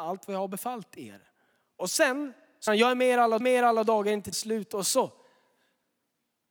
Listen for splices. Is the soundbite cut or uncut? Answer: cut